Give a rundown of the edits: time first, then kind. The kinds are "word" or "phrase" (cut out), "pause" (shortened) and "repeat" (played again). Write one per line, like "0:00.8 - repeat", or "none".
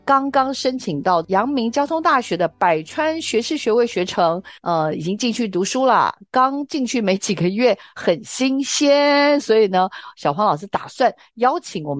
0:04.6 - pause